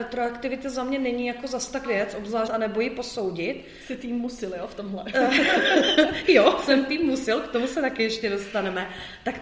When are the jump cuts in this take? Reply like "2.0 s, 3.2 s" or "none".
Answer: 1.9 s, 2.5 s